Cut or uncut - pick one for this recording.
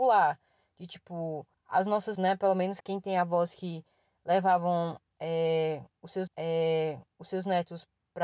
cut